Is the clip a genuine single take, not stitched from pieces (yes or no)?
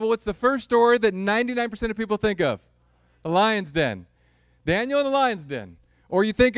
yes